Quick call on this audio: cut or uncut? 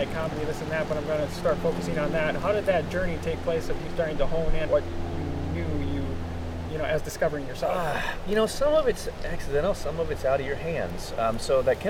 cut